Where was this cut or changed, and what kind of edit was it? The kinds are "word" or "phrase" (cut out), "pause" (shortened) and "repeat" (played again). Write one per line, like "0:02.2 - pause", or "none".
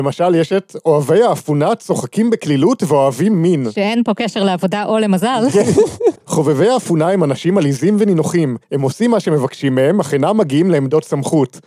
0:06.2 - pause
0:08.6 - pause